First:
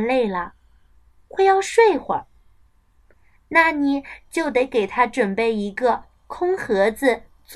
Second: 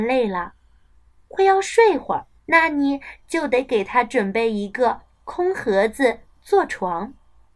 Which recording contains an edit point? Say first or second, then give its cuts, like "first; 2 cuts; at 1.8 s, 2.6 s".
second; 1 cut; at 2.4 s